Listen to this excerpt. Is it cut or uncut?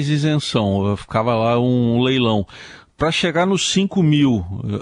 uncut